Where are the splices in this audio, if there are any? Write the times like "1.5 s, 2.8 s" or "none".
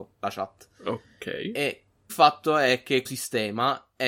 2.1 s, 3.0 s